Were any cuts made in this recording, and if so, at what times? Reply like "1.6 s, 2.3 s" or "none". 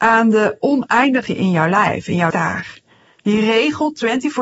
1.3 s, 2.3 s